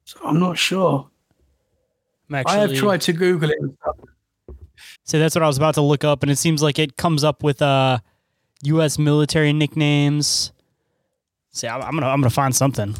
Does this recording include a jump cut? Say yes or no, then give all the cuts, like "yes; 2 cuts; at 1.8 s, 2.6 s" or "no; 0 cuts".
yes; 1 cut; at 4.9 s